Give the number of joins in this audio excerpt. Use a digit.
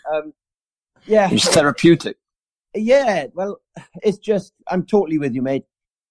2